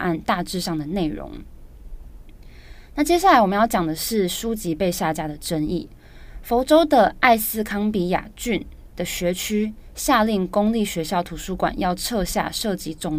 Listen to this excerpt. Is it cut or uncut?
uncut